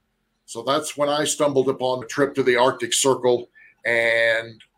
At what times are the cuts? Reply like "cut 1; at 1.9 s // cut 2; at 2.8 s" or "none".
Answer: cut 1; at 2.0 s